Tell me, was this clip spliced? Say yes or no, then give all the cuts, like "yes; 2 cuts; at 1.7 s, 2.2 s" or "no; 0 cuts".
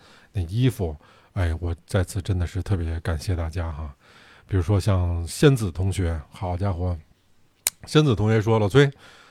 no; 0 cuts